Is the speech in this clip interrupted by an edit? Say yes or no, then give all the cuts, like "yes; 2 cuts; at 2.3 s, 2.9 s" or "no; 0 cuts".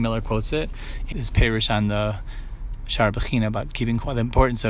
yes; 1 cut; at 1.1 s